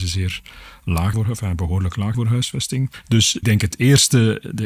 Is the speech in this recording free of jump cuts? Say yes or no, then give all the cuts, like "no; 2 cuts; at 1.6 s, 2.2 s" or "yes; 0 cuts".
no; 3 cuts; at 1.1 s, 2.1 s, 3.4 s